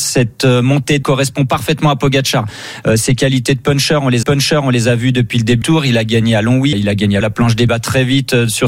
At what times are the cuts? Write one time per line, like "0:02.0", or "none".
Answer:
0:01.0
0:04.2
0:05.6
0:06.7
0:07.2
0:07.7